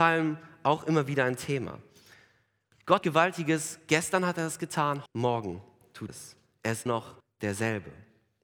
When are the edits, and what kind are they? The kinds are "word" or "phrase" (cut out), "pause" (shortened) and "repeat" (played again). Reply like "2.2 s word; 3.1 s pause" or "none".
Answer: 3.0 s word; 5.1 s phrase; 6.1 s word; 6.9 s word; 7.2 s pause